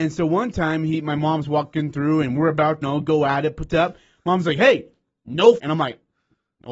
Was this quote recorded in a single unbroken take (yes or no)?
no